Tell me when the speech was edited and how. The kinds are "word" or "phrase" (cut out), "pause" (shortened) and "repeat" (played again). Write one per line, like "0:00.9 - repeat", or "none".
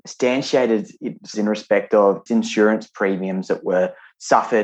0:01.3 - word
0:02.3 - word